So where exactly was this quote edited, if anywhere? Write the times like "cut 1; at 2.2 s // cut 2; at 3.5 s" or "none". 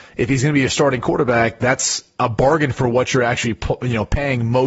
none